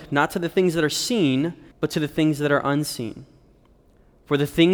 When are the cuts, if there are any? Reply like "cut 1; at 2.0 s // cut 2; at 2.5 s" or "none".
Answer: cut 1; at 1.7 s